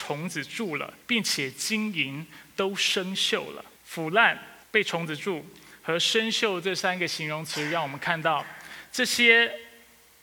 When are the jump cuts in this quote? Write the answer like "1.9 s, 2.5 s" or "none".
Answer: 1.0 s, 3.8 s, 4.6 s